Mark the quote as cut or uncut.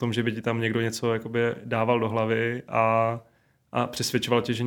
uncut